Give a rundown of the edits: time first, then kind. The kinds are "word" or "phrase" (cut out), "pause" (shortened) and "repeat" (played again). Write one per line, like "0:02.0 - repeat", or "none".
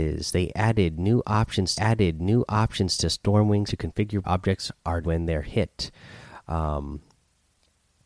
0:01.7 - repeat
0:03.7 - word
0:04.2 - word
0:05.0 - word